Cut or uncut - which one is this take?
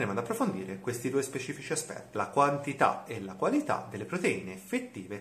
uncut